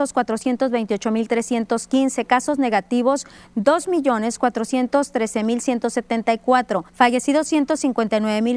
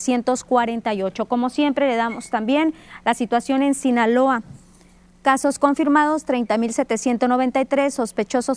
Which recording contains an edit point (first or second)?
first